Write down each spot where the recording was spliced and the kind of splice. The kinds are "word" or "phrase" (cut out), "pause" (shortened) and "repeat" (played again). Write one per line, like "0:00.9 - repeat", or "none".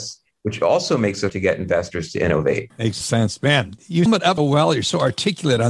0:01.3 - word
0:03.0 - word
0:04.1 - word
0:04.4 - word